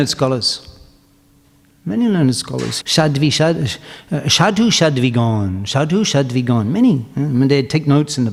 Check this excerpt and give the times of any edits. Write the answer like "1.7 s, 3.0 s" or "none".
2.8 s